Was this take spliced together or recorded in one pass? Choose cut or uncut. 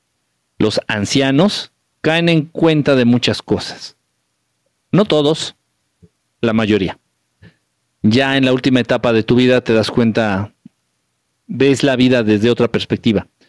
uncut